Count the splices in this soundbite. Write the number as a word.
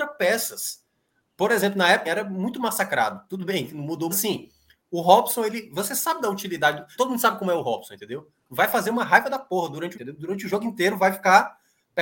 five